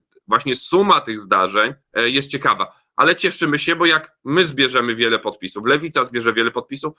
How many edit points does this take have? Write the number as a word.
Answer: one